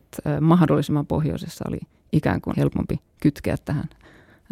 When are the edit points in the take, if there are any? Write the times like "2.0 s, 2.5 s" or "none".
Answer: 2.5 s